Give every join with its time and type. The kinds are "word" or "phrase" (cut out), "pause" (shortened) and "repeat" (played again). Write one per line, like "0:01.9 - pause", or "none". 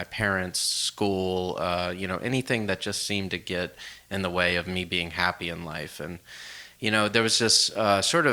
none